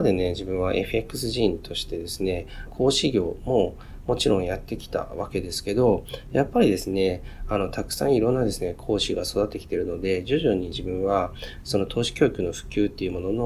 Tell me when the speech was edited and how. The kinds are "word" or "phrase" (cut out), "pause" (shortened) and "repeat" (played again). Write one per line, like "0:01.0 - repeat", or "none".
0:02.7 - phrase